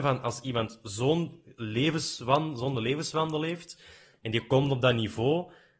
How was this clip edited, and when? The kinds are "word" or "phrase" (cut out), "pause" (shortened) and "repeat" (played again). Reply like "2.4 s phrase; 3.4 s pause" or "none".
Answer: none